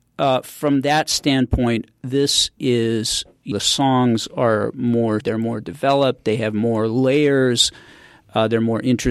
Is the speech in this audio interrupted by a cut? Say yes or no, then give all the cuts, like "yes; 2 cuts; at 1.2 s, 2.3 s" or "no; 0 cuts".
yes; 3 cuts; at 2.6 s, 3.5 s, 5.2 s